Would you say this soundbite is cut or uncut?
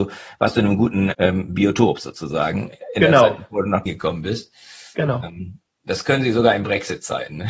cut